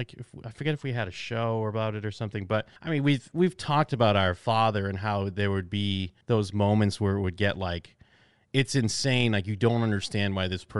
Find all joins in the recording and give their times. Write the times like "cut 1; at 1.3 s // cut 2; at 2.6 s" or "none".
cut 1; at 2.8 s // cut 2; at 6.2 s